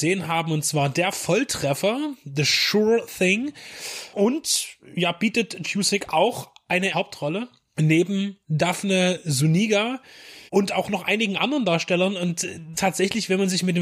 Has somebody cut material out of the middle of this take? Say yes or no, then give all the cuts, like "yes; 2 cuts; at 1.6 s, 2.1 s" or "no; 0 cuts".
yes; 5 cuts; at 5.6 s, 6.9 s, 8.4 s, 10.5 s, 12.7 s